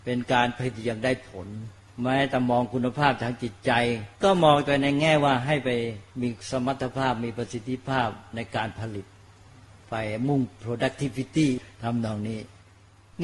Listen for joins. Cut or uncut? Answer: cut